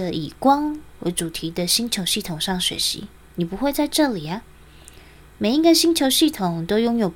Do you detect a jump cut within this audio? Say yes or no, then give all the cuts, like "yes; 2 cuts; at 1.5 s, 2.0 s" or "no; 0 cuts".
no; 0 cuts